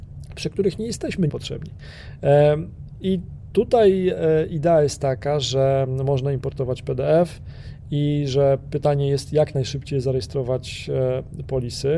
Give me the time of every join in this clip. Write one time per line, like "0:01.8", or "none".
0:01.3